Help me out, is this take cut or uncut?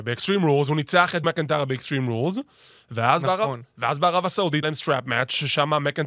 cut